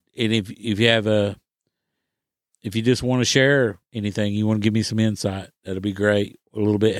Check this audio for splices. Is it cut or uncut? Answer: uncut